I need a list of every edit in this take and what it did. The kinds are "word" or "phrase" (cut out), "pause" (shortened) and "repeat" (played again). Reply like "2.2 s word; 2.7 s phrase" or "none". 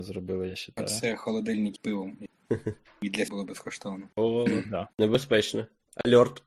1.8 s word; 3.3 s word; 4.1 s pause; 4.9 s pause